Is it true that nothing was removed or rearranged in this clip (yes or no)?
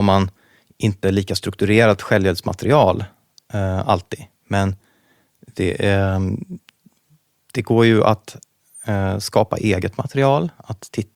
yes